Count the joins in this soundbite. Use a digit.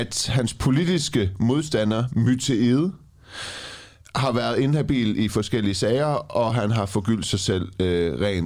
0